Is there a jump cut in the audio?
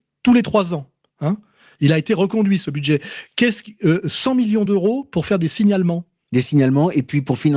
no; 0 cuts

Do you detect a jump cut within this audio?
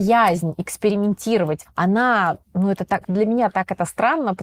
yes; 3 cuts; at 1.6 s, 2.4 s, 3.0 s

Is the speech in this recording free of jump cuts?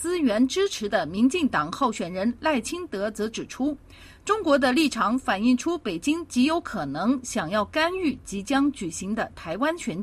yes; 0 cuts

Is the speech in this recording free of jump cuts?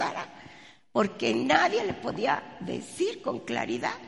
yes; 0 cuts

